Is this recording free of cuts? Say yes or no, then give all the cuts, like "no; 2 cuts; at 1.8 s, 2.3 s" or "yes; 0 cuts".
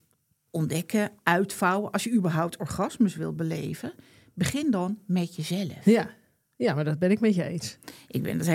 yes; 0 cuts